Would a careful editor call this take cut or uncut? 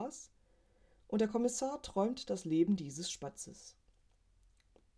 uncut